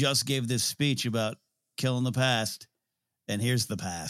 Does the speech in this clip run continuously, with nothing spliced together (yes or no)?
yes